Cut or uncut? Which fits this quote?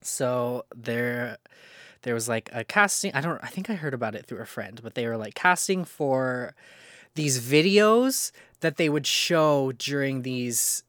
uncut